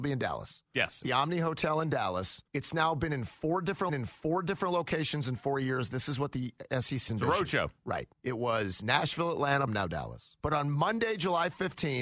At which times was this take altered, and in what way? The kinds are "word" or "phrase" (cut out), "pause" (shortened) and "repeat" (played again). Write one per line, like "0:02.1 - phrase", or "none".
0:01.0 - phrase
0:02.5 - pause
0:03.9 - repeat
0:07.1 - word
0:08.1 - pause
0:09.7 - word
0:10.4 - pause